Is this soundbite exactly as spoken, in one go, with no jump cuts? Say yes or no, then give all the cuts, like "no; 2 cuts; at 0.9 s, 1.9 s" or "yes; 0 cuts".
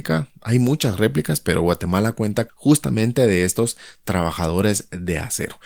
no; 1 cut; at 2.5 s